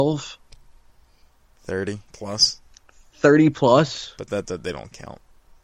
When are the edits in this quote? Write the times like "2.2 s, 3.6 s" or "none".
2.1 s